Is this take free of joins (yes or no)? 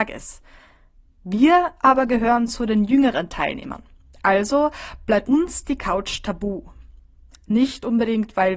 no